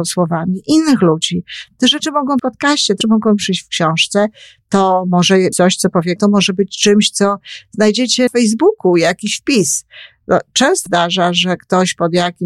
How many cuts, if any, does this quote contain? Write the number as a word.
six